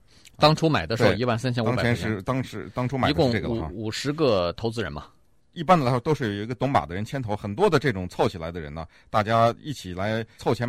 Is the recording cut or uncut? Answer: uncut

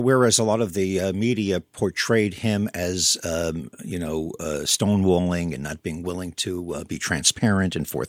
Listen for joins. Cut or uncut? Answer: uncut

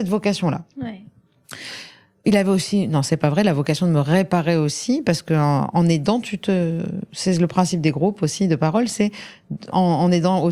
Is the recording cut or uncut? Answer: uncut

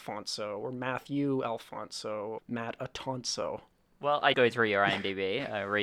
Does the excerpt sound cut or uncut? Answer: cut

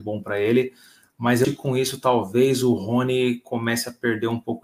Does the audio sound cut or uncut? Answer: cut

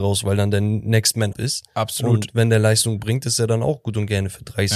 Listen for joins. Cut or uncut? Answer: cut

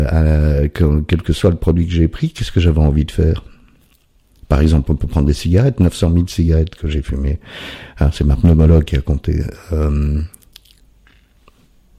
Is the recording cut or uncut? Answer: uncut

